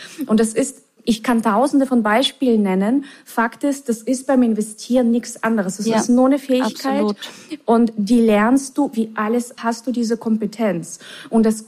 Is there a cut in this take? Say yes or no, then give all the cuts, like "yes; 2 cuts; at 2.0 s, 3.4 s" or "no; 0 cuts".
yes; 2 cuts; at 1.0 s, 9.6 s